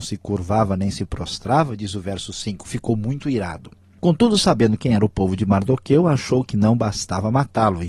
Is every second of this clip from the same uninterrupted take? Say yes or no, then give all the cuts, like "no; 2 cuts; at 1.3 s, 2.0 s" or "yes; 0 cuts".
yes; 0 cuts